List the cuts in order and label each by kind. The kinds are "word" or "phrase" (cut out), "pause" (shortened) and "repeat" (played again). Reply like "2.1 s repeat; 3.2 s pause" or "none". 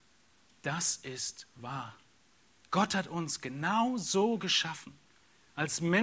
none

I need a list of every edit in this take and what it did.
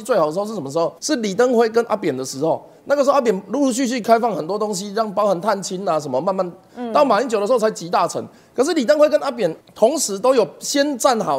1.0 s pause; 9.6 s pause

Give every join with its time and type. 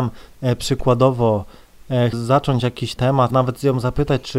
2.1 s word; 3.0 s word; 3.3 s word

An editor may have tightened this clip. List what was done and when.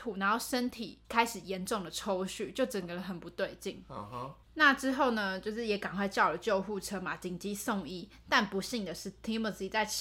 1.0 s pause; 4.4 s pause

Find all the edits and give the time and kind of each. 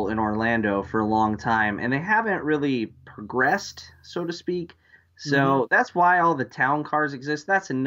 none

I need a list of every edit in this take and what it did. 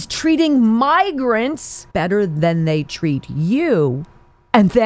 1.9 s pause

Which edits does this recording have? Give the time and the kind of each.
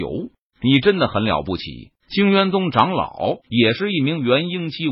2.0 s pause; 3.4 s pause

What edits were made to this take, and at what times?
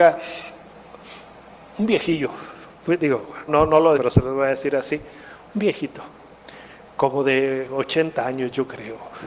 3.5 s word; 3.9 s word

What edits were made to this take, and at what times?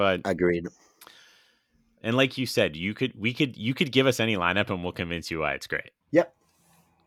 6.0 s pause

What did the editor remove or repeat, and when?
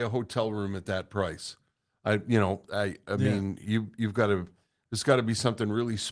none

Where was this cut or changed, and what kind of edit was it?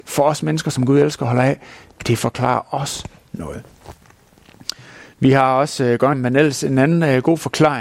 6.1 s phrase

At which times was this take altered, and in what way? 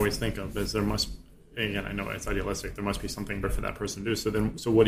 3.4 s word

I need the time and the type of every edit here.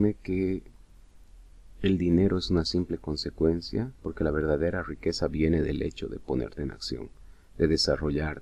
4.0 s pause

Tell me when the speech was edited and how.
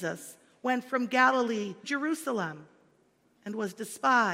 1.8 s word

